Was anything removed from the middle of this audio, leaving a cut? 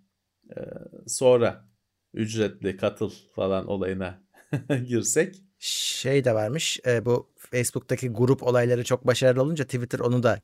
no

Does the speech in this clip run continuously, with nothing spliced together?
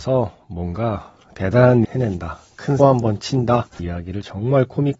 no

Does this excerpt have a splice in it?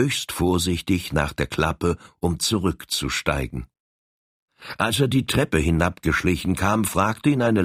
no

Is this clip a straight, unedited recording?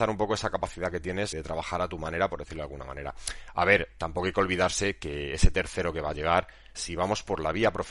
no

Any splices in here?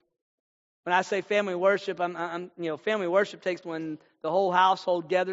yes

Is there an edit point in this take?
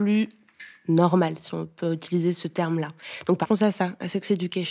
yes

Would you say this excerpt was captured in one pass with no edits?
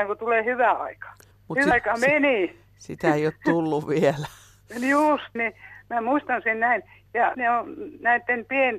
no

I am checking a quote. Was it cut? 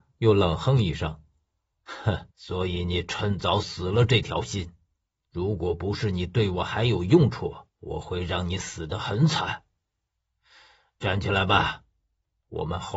yes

